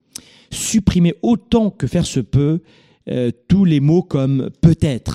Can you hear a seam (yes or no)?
no